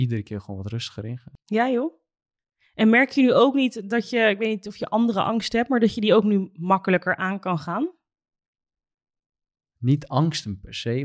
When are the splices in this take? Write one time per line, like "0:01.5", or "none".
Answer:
none